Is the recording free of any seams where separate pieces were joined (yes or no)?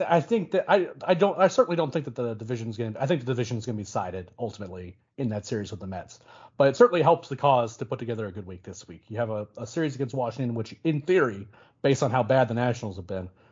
yes